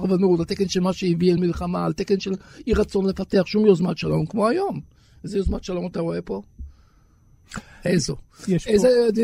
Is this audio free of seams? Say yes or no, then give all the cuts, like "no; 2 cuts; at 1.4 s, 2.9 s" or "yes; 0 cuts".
yes; 0 cuts